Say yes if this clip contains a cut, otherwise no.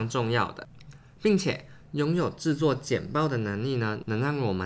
no